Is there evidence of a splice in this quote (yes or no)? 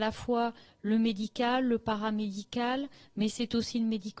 no